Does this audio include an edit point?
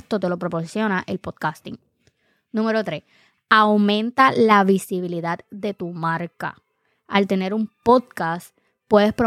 no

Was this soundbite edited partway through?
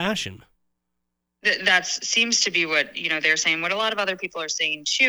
no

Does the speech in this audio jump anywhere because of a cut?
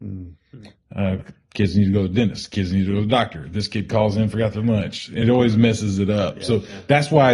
no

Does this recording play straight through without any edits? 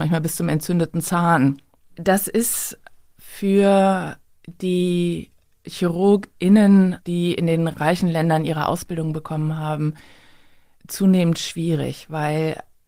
yes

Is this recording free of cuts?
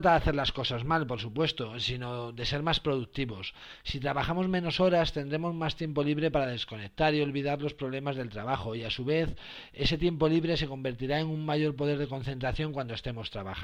yes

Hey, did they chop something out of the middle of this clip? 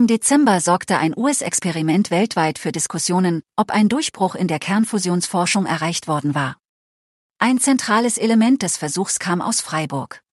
no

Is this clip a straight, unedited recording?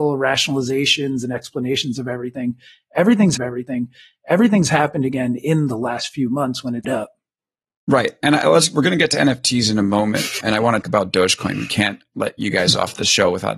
no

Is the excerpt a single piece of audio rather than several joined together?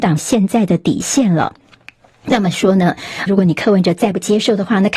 no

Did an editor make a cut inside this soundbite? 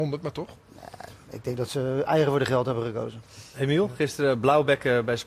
no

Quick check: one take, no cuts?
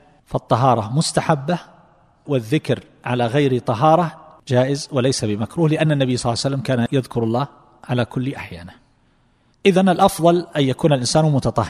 yes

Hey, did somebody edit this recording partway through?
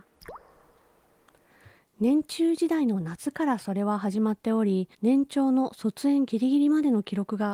yes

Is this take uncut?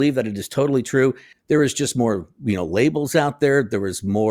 yes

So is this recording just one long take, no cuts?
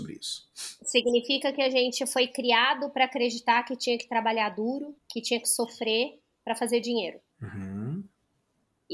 no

